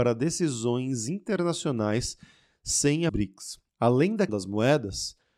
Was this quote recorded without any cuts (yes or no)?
no